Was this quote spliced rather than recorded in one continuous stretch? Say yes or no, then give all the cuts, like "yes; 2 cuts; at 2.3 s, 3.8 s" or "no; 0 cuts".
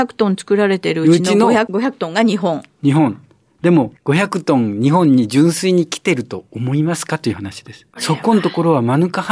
yes; 1 cut; at 7.9 s